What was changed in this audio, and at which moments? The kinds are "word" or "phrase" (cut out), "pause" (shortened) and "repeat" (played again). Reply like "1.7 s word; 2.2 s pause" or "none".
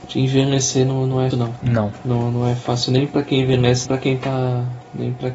1.3 s word; 3.9 s word